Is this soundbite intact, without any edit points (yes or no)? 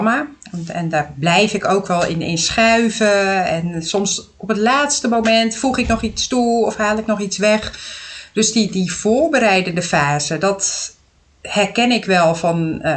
yes